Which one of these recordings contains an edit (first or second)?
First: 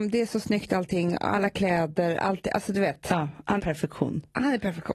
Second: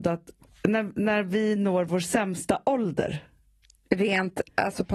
first